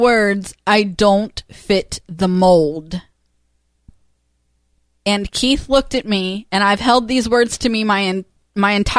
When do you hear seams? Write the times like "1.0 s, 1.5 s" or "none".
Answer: none